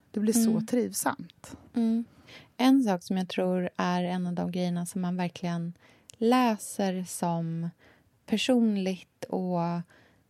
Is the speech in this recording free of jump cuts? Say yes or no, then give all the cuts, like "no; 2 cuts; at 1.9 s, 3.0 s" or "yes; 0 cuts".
yes; 0 cuts